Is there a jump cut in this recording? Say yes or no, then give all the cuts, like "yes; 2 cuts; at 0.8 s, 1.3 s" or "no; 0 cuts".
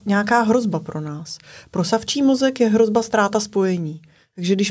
no; 0 cuts